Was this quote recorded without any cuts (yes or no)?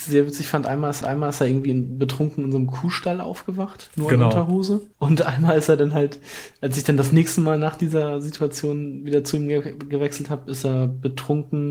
no